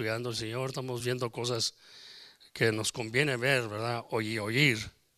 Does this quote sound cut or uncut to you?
uncut